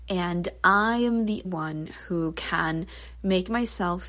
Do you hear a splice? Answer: yes; 1 cut; at 1.4 s

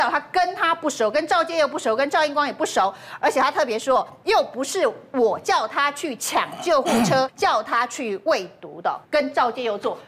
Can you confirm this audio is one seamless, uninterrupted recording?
no; 2 cuts; at 7.3 s, 9.0 s

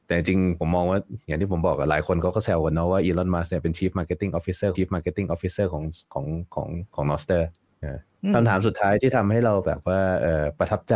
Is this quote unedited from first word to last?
no; 3 cuts; at 4.7 s, 6.1 s, 6.9 s

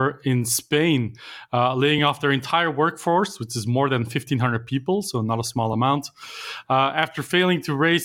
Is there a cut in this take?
no; 0 cuts

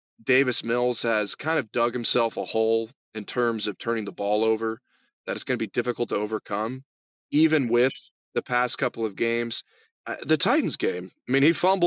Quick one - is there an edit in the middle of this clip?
no; 0 cuts

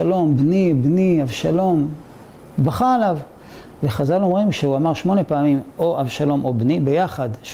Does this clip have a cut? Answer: no; 0 cuts

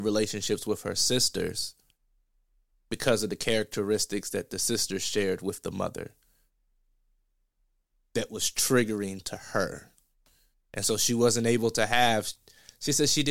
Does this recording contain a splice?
no; 0 cuts

